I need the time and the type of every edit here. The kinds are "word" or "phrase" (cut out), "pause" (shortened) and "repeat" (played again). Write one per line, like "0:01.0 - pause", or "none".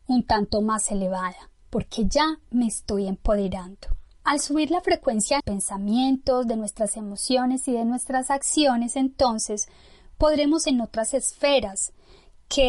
0:04.1 - pause
0:05.4 - word
0:10.6 - word